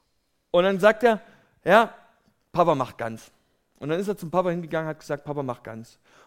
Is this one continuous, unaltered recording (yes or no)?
yes